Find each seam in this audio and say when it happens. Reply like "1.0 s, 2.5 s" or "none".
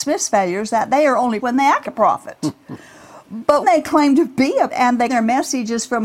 1.4 s, 1.8 s, 3.6 s, 4.7 s, 5.1 s